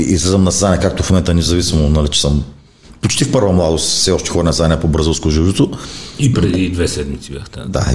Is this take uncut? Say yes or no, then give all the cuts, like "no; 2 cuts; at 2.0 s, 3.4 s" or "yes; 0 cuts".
yes; 0 cuts